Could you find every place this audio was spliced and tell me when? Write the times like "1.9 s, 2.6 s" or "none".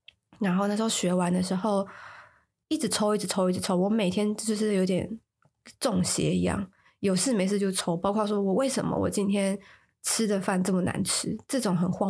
none